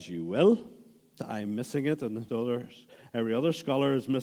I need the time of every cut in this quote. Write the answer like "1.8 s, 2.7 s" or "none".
1.2 s, 2.3 s

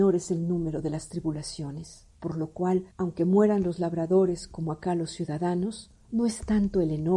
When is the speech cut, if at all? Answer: 2.1 s, 2.9 s, 6.0 s

